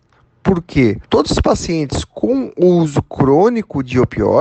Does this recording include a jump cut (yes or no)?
yes